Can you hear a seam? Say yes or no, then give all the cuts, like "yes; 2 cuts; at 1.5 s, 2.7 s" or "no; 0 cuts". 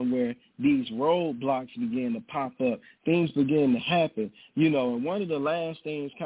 no; 0 cuts